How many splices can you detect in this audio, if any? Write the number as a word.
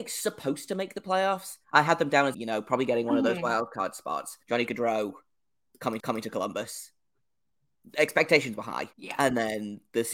five